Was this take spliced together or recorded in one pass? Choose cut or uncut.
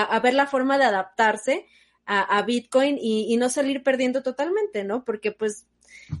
uncut